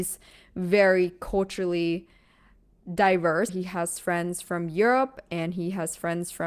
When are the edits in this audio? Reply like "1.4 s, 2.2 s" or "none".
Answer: 3.5 s